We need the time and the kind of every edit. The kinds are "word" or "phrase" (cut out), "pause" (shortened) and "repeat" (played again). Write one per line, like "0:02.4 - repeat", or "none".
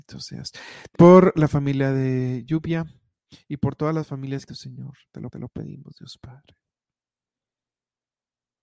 0:00.9 - word
0:04.5 - phrase
0:05.3 - repeat

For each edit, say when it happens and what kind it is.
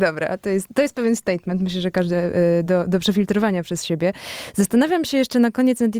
none

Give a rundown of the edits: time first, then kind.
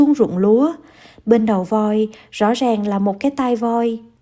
none

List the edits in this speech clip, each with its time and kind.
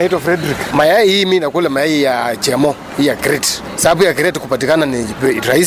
none

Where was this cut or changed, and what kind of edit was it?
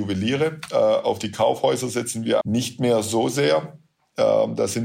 0:02.4 - word

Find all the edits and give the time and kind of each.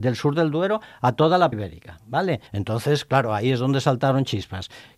0:01.5 - word
0:02.5 - pause

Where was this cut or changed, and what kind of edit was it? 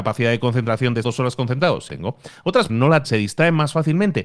0:01.0 - word
0:01.9 - word
0:02.7 - word
0:03.0 - word

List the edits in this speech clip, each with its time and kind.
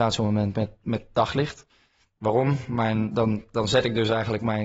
none

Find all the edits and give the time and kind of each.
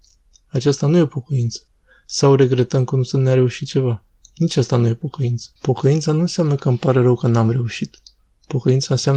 0:05.6 - pause

